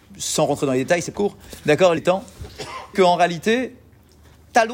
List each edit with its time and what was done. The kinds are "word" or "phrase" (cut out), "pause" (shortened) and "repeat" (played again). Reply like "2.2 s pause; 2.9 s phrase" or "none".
1.1 s word; 2.0 s word; 2.9 s word